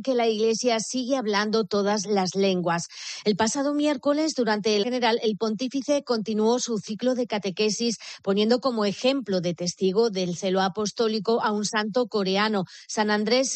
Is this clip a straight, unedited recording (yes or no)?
no